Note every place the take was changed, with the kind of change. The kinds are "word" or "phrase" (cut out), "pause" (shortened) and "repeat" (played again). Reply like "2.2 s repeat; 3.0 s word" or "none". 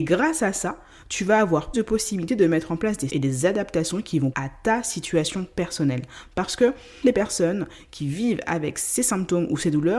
1.7 s word; 3.1 s word; 4.3 s word; 7.0 s word